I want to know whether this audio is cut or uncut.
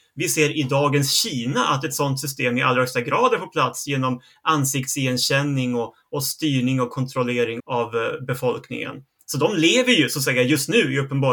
cut